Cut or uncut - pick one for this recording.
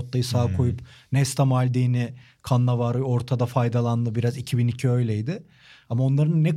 uncut